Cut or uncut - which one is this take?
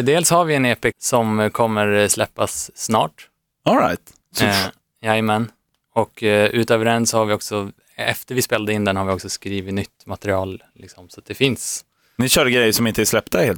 cut